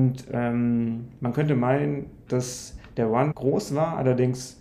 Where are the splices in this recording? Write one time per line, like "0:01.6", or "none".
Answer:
0:03.3